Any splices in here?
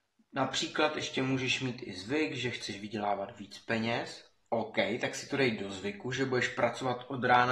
no; 0 cuts

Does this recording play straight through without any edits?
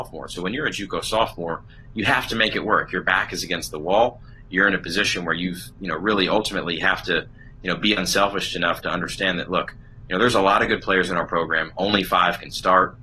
yes; 0 cuts

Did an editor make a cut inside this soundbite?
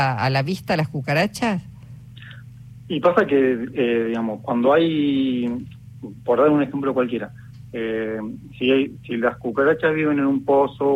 no; 0 cuts

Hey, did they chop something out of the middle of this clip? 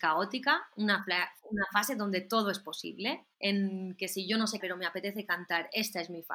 yes; 2 cuts; at 3.3 s, 4.6 s

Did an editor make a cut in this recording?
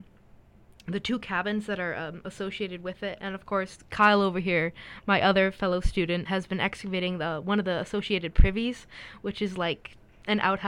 yes; 1 cut; at 6.3 s

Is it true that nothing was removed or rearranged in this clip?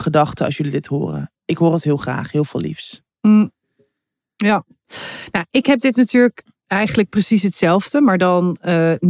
yes; 0 cuts

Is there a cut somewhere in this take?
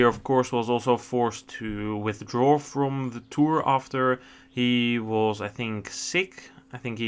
no; 0 cuts

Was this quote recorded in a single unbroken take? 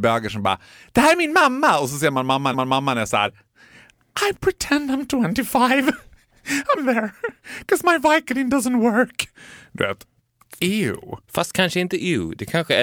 no; 2 cuts; at 2.5 s, 6.8 s

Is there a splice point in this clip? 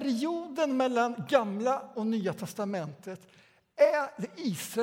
no; 0 cuts

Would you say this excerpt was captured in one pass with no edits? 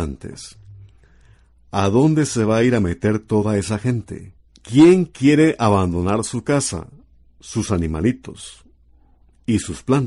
no; 1 cut; at 4.5 s

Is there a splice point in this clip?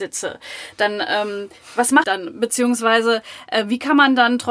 yes; 1 cut; at 2.0 s

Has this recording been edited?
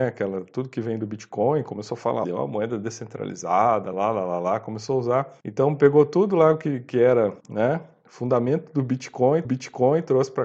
yes; 5 cuts; at 2.2 s, 3.9 s, 5.4 s, 7.4 s, 9.4 s

